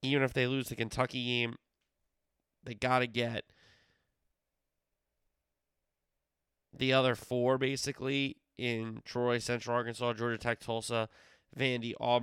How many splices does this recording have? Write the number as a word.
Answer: zero